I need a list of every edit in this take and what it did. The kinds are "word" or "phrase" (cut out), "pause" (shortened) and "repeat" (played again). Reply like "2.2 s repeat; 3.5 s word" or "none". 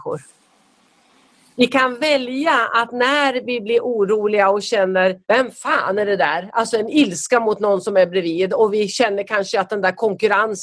5.2 s pause